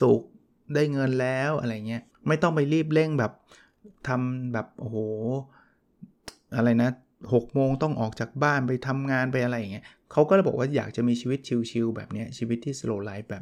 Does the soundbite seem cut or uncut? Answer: cut